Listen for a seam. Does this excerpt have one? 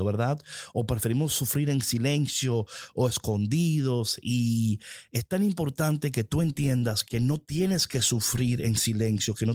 yes; 1 cut; at 7.0 s

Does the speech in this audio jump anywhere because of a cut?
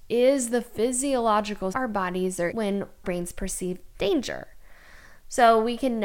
yes; 3 cuts; at 1.7 s, 2.5 s, 3.0 s

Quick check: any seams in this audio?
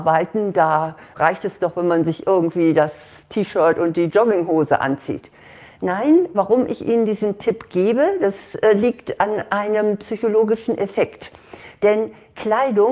no; 0 cuts

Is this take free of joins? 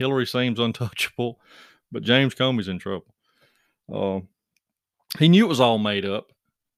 yes; 0 cuts

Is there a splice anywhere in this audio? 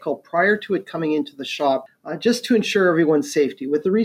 no; 0 cuts

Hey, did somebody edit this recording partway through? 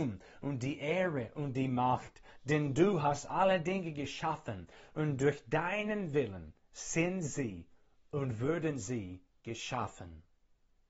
no; 0 cuts

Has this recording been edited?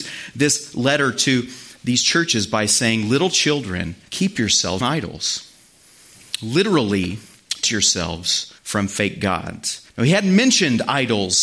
yes; 5 cuts; at 4.1 s, 4.8 s, 7.6 s, 8.6 s, 9.9 s

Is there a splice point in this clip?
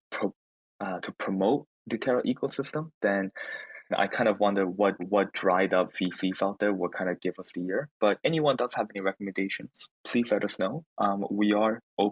yes; 4 cuts; at 1.8 s, 3.9 s, 5.0 s, 8.2 s

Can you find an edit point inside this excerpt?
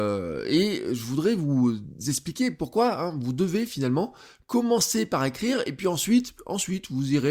no; 0 cuts

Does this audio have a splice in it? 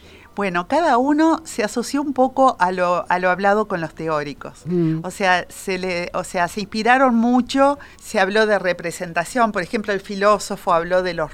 yes; 1 cut; at 7.9 s

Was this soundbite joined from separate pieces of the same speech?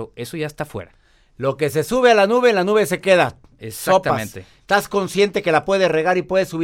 no; 0 cuts

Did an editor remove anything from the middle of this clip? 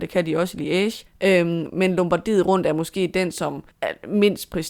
yes; 2 cuts; at 1.1 s, 3.7 s

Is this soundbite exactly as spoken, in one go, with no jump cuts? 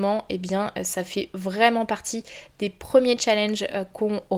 yes; 0 cuts

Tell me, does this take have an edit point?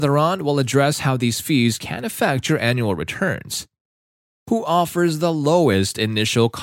no; 0 cuts

